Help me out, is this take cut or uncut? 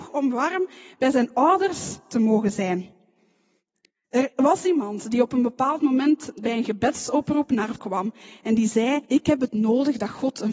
cut